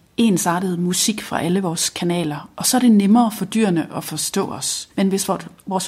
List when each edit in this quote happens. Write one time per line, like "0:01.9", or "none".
0:04.9

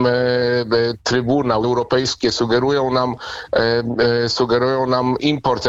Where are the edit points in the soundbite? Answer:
0:01.6

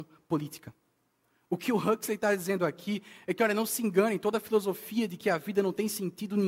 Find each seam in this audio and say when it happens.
none

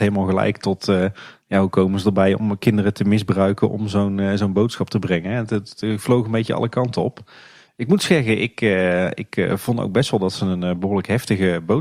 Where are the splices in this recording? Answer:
none

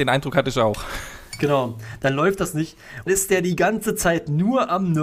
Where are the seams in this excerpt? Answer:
0:03.1

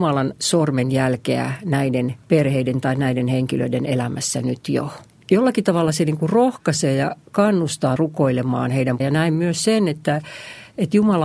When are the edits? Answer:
0:05.1
0:08.0
0:09.0

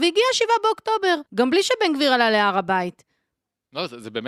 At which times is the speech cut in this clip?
0:01.3

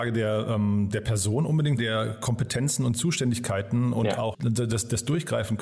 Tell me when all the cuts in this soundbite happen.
0:01.8
0:04.3

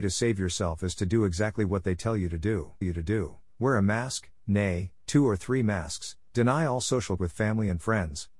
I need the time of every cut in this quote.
0:02.8
0:07.2

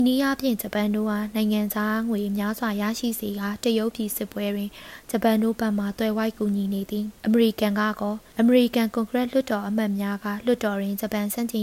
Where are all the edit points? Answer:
0:07.2
0:08.3

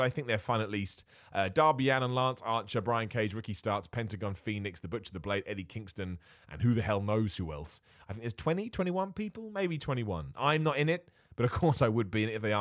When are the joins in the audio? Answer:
none

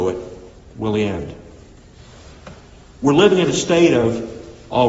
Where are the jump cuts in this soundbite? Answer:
none

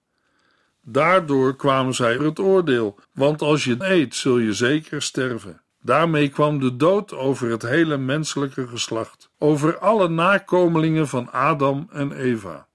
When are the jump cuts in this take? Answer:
0:02.2
0:03.0
0:03.8
0:05.7
0:09.3

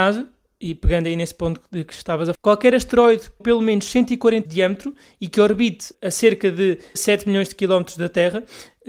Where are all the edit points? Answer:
0:02.3
0:03.4
0:04.5
0:05.9
0:06.9

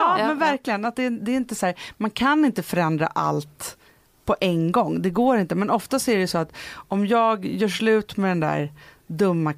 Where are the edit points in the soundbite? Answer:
none

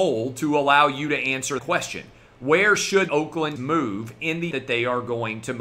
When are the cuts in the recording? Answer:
0:01.6
0:03.1
0:03.6
0:04.5

